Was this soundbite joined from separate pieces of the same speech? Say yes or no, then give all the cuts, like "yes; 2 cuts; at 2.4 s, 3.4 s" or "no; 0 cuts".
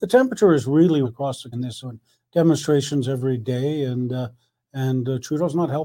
yes; 3 cuts; at 1.0 s, 1.5 s, 1.8 s